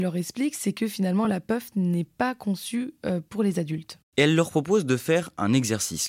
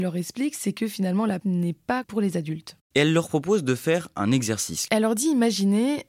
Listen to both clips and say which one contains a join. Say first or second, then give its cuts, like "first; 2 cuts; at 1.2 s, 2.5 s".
second; 3 cuts; at 1.4 s, 2.0 s, 4.9 s